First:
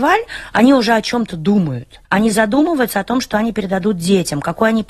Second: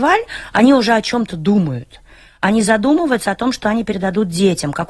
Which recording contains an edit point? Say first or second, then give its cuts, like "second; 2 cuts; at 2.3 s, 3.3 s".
first; 1 cut; at 2.0 s